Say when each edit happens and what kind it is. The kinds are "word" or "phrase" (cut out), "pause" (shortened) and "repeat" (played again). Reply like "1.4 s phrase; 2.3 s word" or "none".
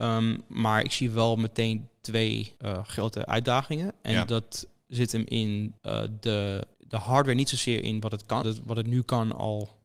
2.6 s pause; 5.8 s pause; 6.7 s pause; 8.4 s phrase